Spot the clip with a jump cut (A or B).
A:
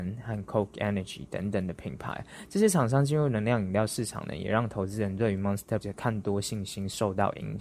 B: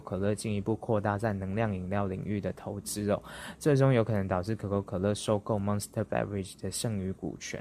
A